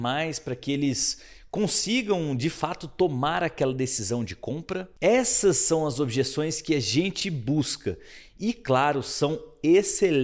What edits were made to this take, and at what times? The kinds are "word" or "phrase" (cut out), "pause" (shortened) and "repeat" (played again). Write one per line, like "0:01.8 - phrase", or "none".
none